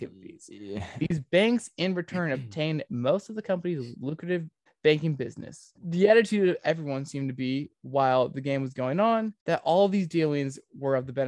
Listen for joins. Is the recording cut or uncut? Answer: cut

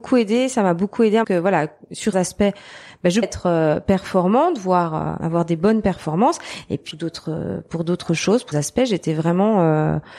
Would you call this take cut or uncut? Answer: cut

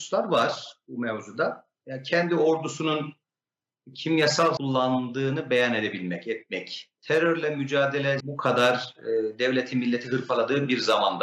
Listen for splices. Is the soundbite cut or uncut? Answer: cut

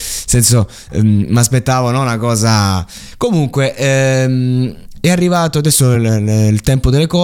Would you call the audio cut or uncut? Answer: uncut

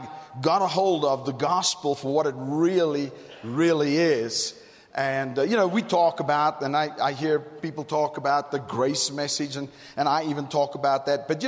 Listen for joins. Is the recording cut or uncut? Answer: uncut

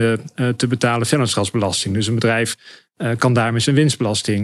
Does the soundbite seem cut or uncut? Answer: uncut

